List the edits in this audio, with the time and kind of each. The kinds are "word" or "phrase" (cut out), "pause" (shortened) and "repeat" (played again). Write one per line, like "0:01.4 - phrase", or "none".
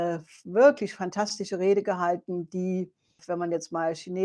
0:03.2 - word